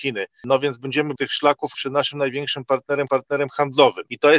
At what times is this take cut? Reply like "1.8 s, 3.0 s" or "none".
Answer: 1.2 s, 1.7 s, 3.1 s